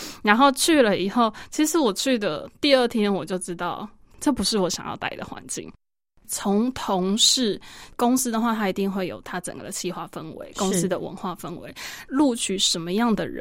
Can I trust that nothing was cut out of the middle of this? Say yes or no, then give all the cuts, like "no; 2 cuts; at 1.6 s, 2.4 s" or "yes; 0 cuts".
yes; 0 cuts